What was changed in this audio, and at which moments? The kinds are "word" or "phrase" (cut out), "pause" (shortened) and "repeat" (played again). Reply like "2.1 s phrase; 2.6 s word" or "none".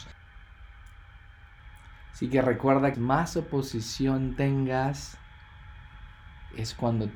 2.9 s phrase